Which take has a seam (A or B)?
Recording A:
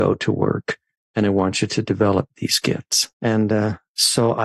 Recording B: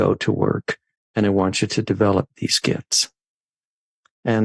A